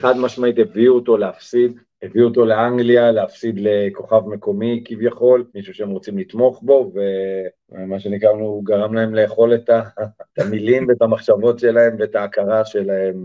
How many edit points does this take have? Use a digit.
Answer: 4